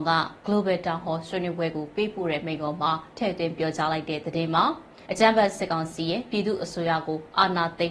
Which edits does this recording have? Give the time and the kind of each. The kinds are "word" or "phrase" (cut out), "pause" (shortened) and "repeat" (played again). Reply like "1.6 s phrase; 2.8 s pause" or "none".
5.1 s pause